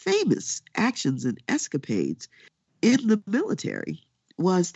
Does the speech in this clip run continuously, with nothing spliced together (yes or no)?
yes